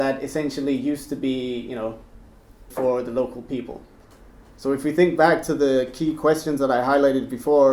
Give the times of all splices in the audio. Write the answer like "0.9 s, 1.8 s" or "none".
2.7 s